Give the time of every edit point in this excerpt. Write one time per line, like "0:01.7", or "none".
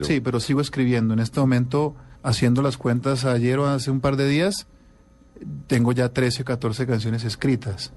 0:02.2